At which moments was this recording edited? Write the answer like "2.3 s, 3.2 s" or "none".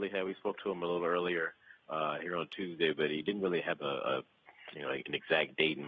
none